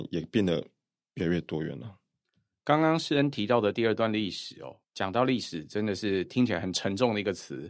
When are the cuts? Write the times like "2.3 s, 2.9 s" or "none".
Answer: 4.8 s